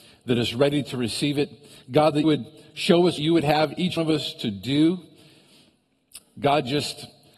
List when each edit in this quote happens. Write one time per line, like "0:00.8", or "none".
0:02.2
0:03.2
0:04.0